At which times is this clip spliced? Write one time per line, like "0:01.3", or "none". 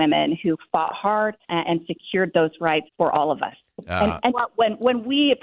0:01.4
0:02.9
0:04.3